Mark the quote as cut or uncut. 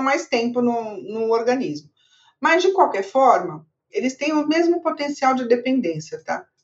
uncut